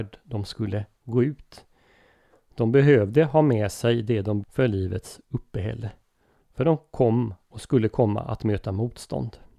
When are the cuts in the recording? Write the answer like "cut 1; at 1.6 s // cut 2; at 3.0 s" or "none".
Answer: cut 1; at 4.4 s